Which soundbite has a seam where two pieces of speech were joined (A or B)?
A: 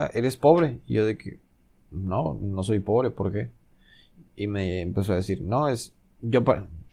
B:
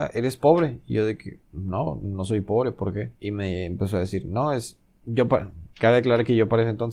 B